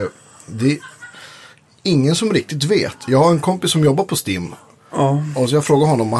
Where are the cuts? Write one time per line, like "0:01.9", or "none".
none